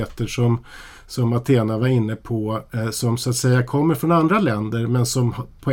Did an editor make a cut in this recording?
no; 0 cuts

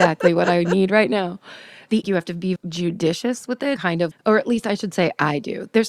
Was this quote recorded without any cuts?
no; 4 cuts; at 2.0 s, 2.6 s, 3.8 s, 4.1 s

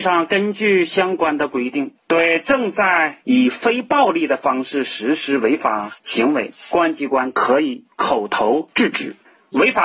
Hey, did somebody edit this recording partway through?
yes; 3 cuts; at 2.0 s, 6.0 s, 7.9 s

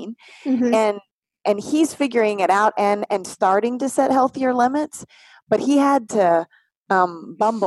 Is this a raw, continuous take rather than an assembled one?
yes; 0 cuts

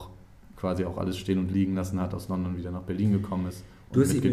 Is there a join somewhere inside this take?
no; 0 cuts

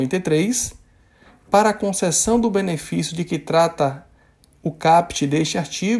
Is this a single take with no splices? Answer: yes; 0 cuts

